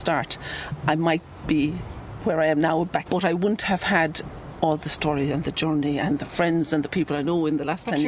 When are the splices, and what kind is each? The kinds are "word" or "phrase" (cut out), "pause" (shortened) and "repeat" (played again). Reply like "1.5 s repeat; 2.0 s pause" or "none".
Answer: 3.1 s word

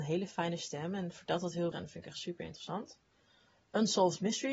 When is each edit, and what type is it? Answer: 1.7 s word

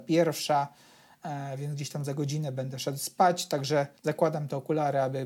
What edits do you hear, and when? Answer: 4.0 s pause

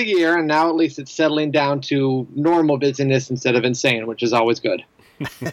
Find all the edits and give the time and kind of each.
none

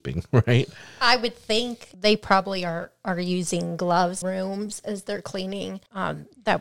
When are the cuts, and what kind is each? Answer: 4.2 s phrase

